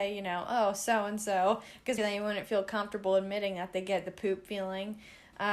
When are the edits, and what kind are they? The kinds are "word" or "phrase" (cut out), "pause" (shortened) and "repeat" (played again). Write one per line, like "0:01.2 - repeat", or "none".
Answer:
0:02.0 - word